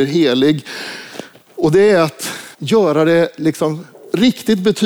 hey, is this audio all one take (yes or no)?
no